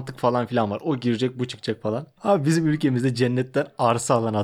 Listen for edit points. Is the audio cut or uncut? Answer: uncut